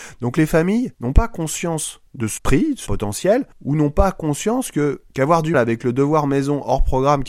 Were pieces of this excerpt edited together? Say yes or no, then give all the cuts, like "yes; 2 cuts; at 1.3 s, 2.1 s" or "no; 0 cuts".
yes; 7 cuts; at 0.9 s, 2.1 s, 2.4 s, 2.9 s, 3.5 s, 5.1 s, 5.5 s